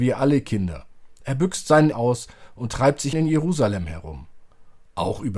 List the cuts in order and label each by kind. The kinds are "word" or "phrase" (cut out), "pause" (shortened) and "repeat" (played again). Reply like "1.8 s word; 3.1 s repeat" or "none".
1.9 s word; 3.1 s word

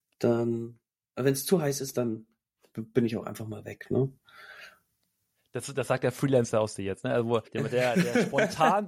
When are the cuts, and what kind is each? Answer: 7.5 s pause

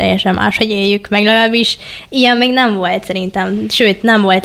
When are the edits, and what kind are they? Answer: none

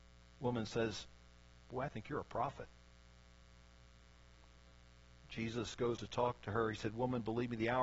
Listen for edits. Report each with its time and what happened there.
6.0 s word

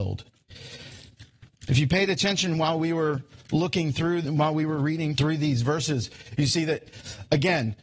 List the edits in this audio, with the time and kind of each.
4.2 s word; 5.2 s word

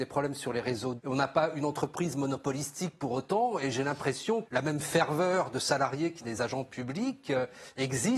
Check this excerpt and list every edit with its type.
1.0 s word; 4.4 s word; 6.2 s phrase

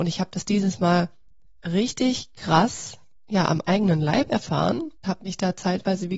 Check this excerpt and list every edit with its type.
3.2 s pause; 5.0 s word

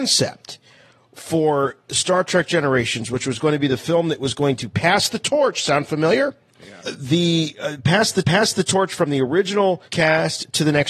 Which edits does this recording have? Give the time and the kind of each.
6.8 s pause; 8.2 s repeat; 9.9 s pause

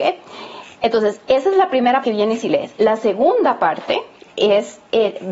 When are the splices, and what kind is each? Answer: 2.0 s word

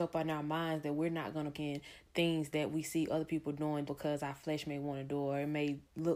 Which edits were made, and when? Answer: 1.5 s word; 3.9 s word

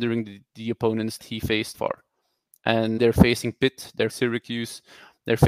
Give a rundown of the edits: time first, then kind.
1.2 s word; 1.7 s word; 3.0 s word; 4.1 s word

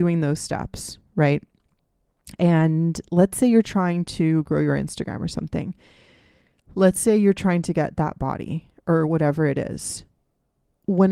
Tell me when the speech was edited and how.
none

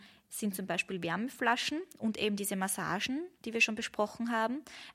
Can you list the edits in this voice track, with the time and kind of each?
3.4 s pause

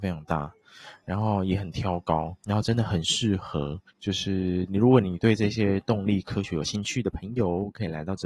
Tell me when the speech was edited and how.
2.4 s pause; 3.9 s pause

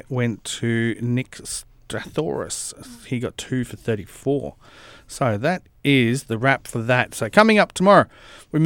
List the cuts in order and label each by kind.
none

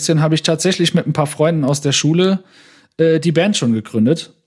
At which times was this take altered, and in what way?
none

